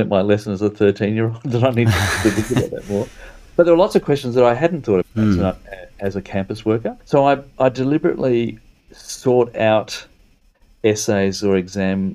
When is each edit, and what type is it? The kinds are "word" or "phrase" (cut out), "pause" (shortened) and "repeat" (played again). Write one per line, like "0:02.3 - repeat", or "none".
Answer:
0:05.0 - word
0:07.0 - pause